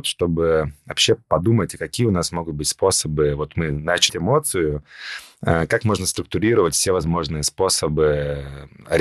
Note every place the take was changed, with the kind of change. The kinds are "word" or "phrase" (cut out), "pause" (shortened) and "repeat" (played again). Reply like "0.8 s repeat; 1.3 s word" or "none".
4.1 s word